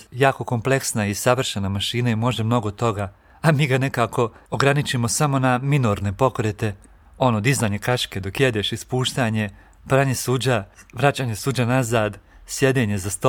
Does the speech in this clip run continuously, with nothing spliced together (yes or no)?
yes